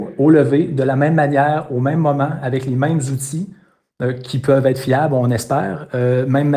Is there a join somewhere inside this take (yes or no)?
no